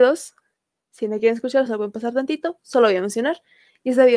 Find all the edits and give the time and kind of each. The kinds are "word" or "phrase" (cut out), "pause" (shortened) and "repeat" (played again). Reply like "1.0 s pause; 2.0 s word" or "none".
none